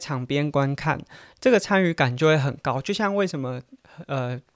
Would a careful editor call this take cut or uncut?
uncut